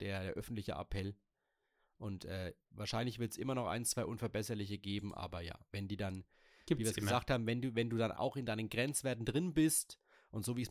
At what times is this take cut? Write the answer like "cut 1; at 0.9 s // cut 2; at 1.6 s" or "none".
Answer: cut 1; at 8.1 s